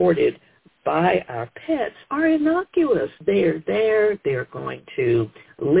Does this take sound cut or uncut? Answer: cut